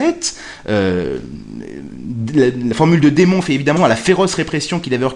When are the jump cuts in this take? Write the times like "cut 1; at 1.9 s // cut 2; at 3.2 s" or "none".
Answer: cut 1; at 3.8 s